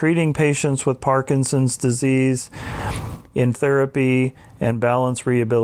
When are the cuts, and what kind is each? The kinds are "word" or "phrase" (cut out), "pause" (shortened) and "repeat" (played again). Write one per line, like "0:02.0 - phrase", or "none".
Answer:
0:03.5 - word